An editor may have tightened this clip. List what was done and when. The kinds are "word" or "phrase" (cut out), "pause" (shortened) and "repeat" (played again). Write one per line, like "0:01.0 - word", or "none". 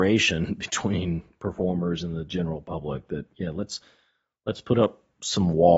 none